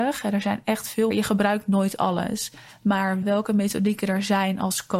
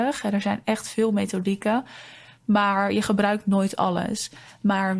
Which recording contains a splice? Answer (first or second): first